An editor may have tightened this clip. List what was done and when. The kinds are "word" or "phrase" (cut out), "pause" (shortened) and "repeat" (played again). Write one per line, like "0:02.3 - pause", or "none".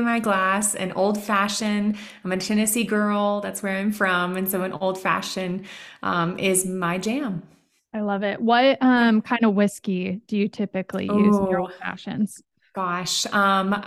none